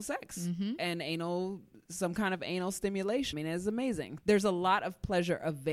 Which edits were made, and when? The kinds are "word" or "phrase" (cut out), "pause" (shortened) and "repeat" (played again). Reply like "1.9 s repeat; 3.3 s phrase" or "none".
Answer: 3.3 s word; 4.2 s word